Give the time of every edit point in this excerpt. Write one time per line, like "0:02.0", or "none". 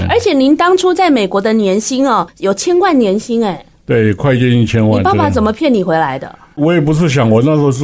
0:02.3

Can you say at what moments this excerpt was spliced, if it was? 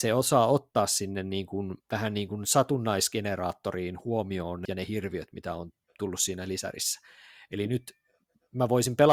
0:01.8
0:04.6

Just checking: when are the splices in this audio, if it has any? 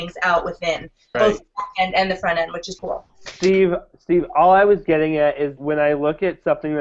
0:01.1
0:02.8
0:03.1
0:05.6

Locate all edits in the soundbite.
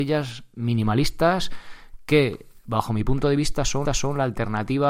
0:03.9

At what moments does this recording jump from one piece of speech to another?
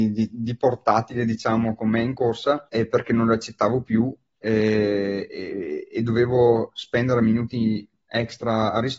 0:02.7

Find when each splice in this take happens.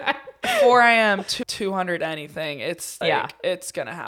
0:01.4
0:03.0

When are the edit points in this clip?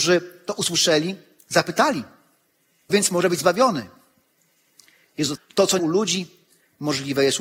0:02.9
0:05.4
0:05.8

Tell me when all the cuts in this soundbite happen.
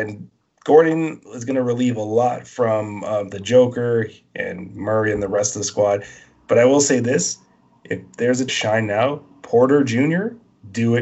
0:08.5

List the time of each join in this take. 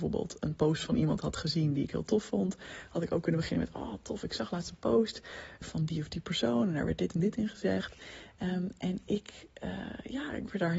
0:05.6

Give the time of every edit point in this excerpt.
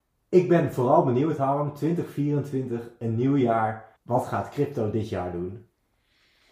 0:04.0

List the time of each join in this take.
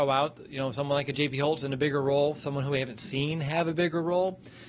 none

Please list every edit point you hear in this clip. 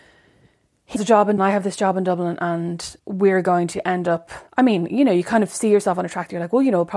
0:01.0
0:01.4
0:03.0
0:04.5

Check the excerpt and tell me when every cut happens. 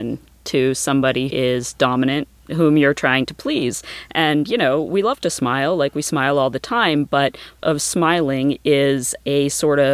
0:01.3
0:07.6

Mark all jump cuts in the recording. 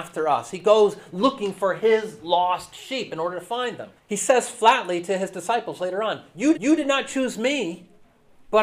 0:04.0
0:06.5

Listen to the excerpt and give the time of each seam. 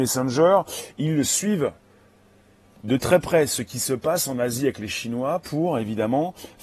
0:02.8

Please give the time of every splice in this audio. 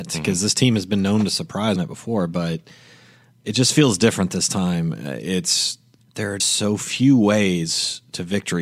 0:01.8
0:06.0
0:06.4

